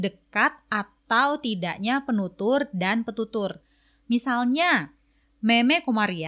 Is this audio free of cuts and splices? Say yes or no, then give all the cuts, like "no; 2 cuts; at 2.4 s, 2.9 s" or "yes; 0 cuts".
yes; 0 cuts